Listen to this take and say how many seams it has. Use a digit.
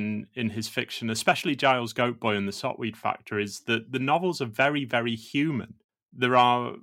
0